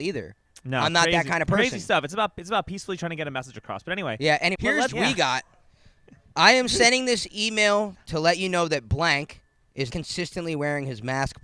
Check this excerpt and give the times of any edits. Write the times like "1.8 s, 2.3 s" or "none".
4.5 s, 4.9 s, 9.9 s